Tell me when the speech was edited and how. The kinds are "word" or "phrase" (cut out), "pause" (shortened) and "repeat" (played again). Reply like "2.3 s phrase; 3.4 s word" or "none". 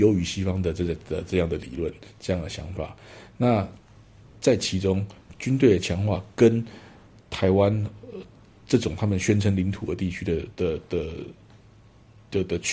none